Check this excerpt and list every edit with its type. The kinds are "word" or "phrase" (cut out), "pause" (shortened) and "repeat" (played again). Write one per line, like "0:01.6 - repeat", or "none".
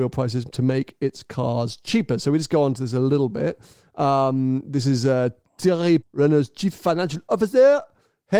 0:06.0 - word